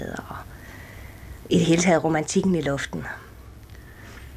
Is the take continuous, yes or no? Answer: yes